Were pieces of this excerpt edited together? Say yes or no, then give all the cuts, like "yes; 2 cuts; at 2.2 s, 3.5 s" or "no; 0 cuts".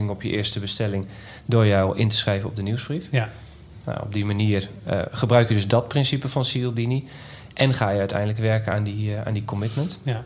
no; 0 cuts